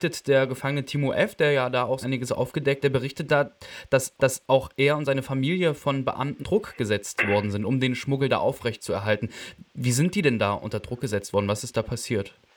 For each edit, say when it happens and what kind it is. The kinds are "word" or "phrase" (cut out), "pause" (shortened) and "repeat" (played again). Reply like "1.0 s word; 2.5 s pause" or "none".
2.0 s word; 2.8 s word; 4.2 s repeat; 6.4 s word